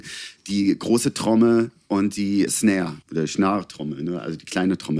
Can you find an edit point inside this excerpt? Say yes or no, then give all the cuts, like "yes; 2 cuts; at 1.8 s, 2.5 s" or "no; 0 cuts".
yes; 2 cuts; at 2.5 s, 3.0 s